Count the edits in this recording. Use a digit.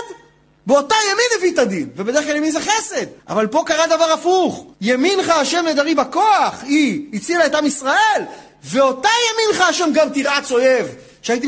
2